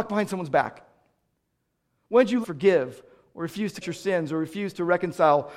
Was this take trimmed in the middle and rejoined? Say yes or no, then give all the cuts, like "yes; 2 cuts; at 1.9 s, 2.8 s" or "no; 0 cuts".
yes; 2 cuts; at 2.4 s, 3.8 s